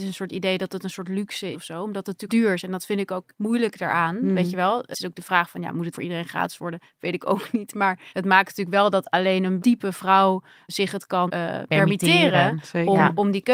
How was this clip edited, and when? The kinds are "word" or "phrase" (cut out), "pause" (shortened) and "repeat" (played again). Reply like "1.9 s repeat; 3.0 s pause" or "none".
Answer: 1.5 s word; 2.3 s word; 3.3 s word; 4.9 s word; 5.9 s word; 8.1 s word; 9.6 s word; 10.7 s word; 11.3 s word